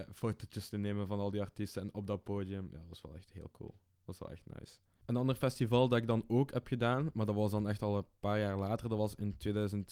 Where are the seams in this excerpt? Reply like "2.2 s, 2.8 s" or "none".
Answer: 8.2 s